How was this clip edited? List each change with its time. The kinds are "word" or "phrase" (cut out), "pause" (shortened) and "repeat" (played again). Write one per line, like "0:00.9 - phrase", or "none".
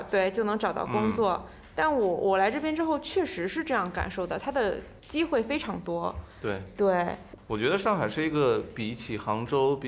0:05.0 - pause